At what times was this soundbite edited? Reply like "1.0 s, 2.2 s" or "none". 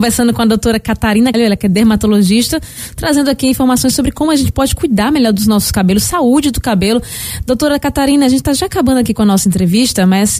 1.3 s